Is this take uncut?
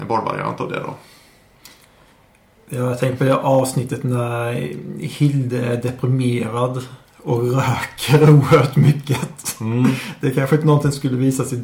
yes; 0 cuts

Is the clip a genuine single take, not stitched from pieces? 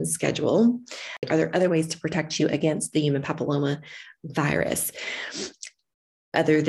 yes; 0 cuts

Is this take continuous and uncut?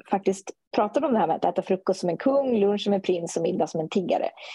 yes; 0 cuts

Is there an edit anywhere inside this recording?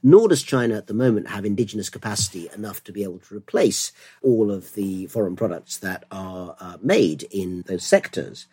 no; 0 cuts

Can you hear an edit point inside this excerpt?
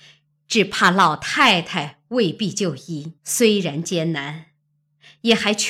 yes; 1 cut; at 3.2 s

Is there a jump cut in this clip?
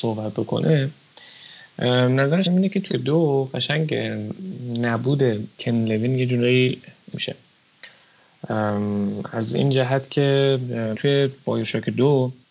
yes; 4 cuts; at 2.4 s, 2.9 s, 7.1 s, 10.9 s

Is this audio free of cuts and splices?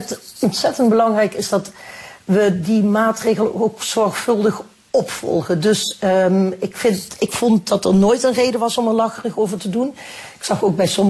yes; 0 cuts

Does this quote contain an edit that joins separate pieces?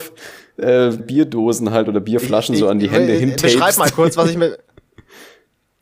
yes; 1 cut; at 1.0 s

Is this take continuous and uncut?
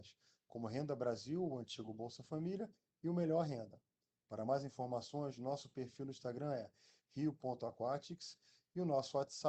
yes; 0 cuts

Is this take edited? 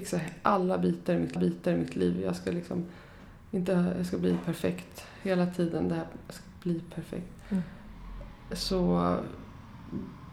yes; 1 cut; at 1.4 s

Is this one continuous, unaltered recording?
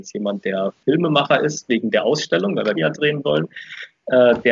no; 1 cut; at 2.7 s

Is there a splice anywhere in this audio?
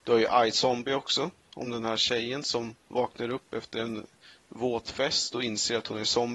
no; 0 cuts

